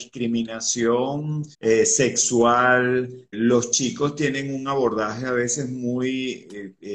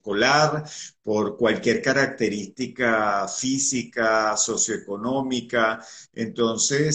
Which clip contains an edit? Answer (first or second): first